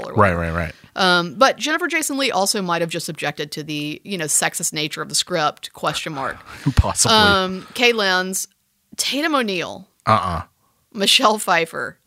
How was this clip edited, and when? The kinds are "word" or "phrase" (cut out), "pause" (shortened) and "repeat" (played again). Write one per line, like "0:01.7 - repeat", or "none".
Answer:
none